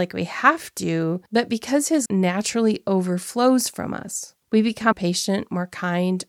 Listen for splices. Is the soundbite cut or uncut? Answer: cut